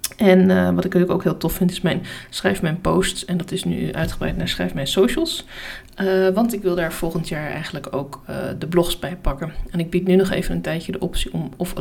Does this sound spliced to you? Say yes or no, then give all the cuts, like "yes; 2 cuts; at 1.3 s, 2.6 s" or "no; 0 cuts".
no; 0 cuts